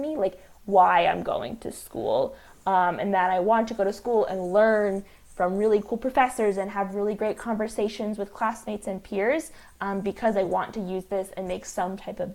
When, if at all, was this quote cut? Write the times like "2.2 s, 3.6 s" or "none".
none